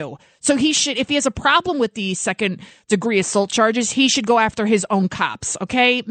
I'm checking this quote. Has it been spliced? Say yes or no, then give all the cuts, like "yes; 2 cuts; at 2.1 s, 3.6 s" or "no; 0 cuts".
no; 0 cuts